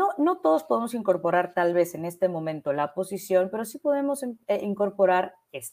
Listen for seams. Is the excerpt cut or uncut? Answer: uncut